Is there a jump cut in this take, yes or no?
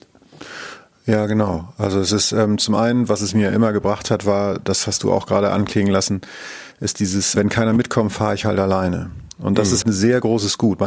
yes